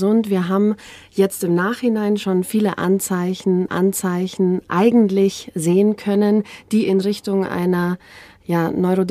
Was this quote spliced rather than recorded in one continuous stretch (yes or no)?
yes